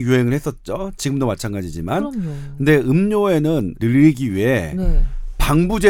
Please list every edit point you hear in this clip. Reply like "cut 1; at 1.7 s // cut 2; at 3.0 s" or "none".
cut 1; at 3.8 s